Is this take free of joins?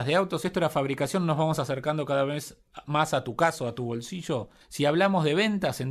no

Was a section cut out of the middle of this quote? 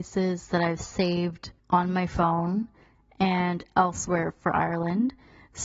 yes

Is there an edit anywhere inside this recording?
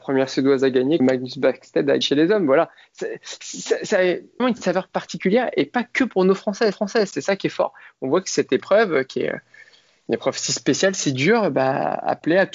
yes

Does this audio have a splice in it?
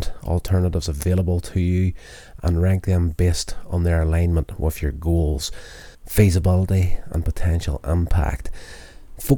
yes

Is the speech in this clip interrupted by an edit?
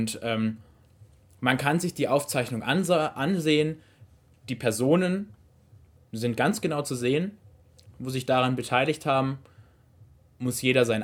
no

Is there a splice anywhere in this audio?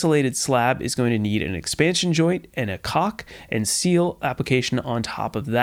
no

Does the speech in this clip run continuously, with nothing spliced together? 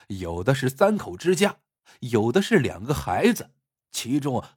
yes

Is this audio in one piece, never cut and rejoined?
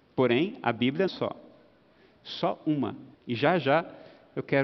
no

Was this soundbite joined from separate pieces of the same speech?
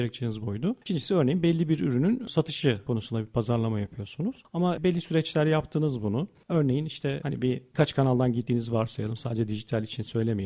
no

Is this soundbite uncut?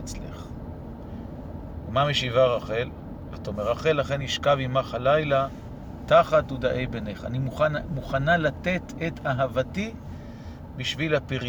yes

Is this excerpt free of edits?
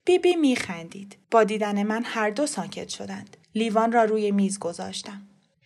no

